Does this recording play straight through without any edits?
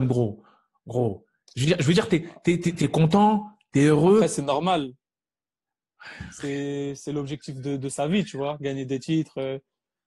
yes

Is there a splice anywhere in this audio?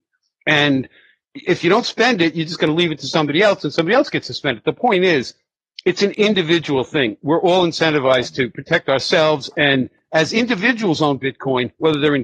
no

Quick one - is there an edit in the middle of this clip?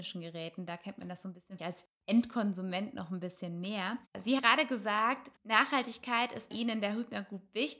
yes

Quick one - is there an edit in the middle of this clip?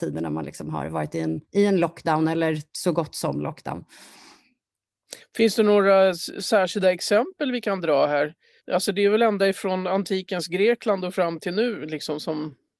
yes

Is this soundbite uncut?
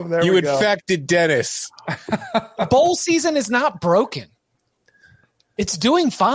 yes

